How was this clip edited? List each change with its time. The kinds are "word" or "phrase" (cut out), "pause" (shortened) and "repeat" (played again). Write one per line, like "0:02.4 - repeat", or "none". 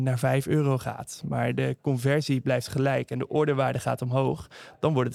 none